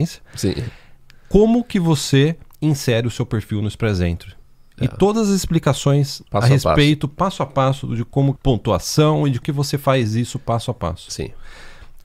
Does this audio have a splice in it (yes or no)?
yes